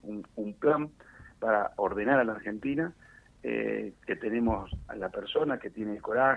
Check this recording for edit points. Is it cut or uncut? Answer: uncut